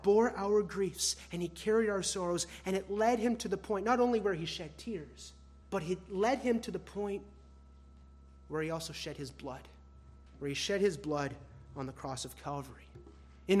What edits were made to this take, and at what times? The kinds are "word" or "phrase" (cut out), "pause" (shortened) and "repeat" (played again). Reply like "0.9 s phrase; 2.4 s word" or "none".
5.6 s pause; 10.3 s pause